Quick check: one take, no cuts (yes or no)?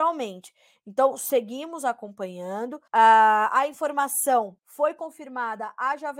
no